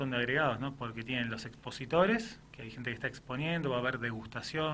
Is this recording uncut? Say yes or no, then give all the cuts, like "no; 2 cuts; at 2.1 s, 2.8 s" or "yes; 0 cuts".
yes; 0 cuts